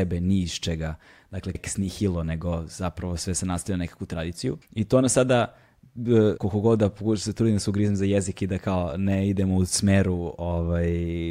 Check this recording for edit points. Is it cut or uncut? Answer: cut